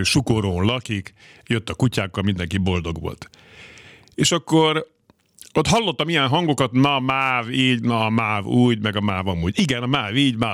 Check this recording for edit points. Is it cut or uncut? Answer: uncut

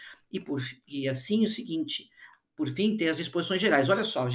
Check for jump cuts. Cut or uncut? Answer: uncut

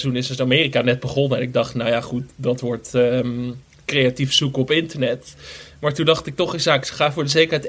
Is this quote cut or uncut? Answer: uncut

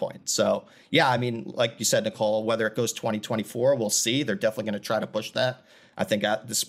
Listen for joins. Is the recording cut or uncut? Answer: uncut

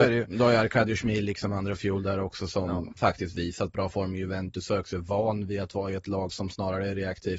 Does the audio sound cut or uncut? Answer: uncut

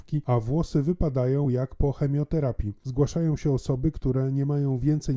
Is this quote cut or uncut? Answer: uncut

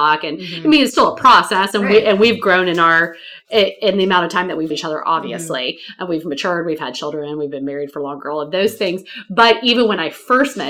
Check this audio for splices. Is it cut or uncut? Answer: cut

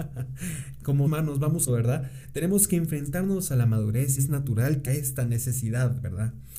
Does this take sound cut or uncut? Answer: cut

